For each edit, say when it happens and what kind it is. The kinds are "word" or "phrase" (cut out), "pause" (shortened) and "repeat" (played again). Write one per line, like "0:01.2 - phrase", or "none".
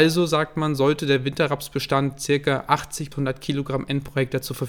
0:03.1 - word